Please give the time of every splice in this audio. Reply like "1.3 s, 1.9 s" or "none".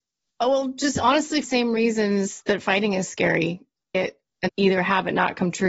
1.4 s, 3.9 s, 4.5 s